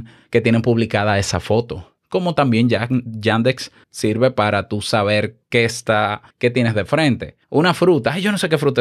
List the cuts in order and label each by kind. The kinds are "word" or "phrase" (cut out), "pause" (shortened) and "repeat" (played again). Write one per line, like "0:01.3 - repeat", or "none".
0:02.0 - pause
0:03.8 - pause
0:05.4 - pause
0:06.3 - pause
0:07.4 - pause